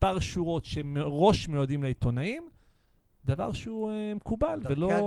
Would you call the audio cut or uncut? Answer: uncut